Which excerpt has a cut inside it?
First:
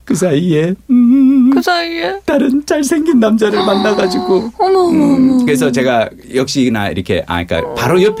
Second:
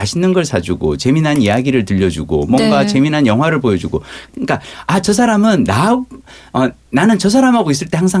second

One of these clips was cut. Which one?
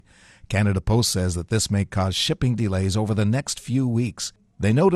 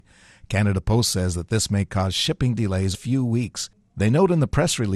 second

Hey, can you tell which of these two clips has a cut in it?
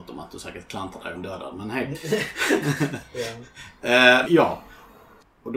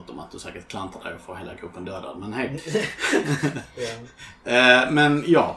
first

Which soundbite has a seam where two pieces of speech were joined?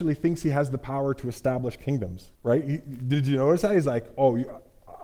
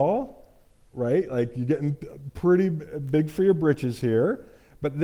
first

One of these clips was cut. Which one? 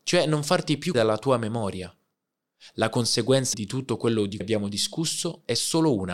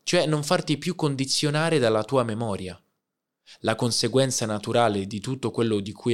first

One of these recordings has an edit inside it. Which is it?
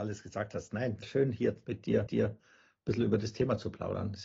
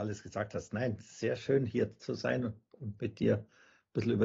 first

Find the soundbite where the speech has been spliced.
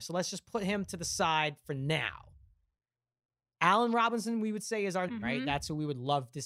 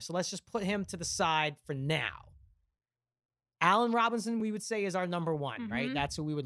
first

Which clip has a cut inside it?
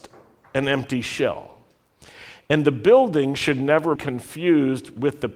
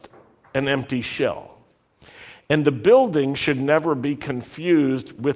first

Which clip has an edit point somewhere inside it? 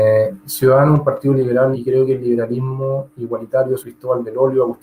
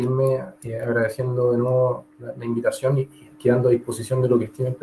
first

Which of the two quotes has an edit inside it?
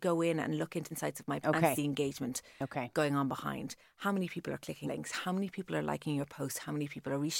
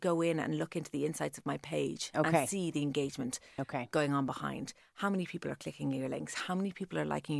first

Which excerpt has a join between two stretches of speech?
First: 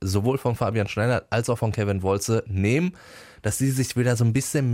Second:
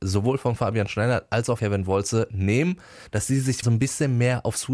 second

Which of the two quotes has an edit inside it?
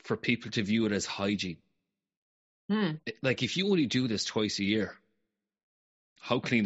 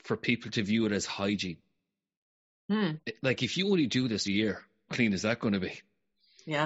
second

